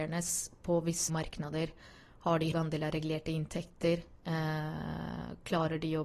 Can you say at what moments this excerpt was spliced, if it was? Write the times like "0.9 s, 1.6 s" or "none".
1.1 s, 2.5 s